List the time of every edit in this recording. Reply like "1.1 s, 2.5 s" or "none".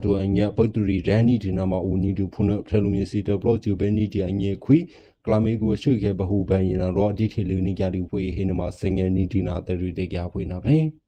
none

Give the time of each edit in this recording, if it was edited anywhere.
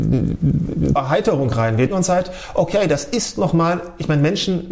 1.0 s, 1.9 s

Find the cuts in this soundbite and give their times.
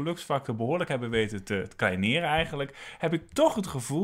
none

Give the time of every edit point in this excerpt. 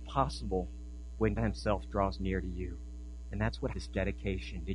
1.4 s, 3.7 s

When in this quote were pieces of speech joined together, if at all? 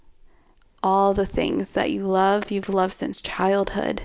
none

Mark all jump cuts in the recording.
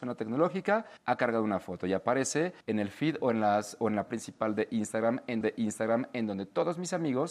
1.0 s, 2.6 s, 4.1 s, 5.4 s

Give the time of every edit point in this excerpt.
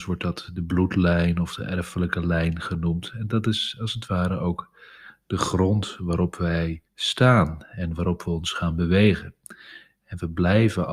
6.8 s

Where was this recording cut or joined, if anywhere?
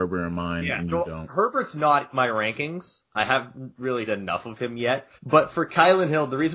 2.1 s, 3.0 s, 4.1 s, 5.2 s

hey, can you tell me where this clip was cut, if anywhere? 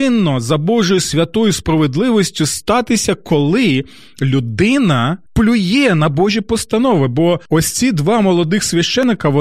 5.3 s, 7.5 s

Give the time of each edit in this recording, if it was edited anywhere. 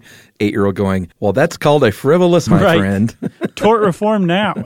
1.1 s, 2.5 s

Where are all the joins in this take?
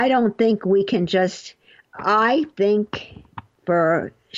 none

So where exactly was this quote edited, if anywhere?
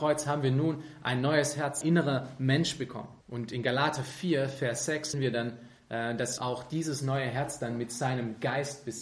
1.8 s, 3.2 s, 5.1 s, 6.4 s

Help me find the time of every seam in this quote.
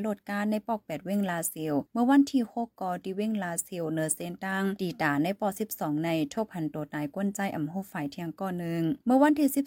1.9 s

